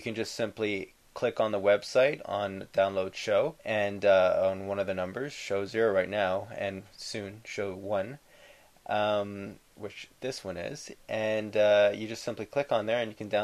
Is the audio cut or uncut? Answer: cut